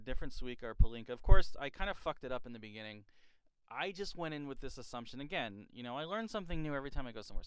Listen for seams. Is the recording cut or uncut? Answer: uncut